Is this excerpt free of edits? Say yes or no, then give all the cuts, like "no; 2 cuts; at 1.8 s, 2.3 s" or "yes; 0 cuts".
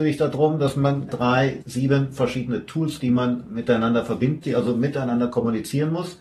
no; 4 cuts; at 1.1 s, 1.6 s, 3.0 s, 4.4 s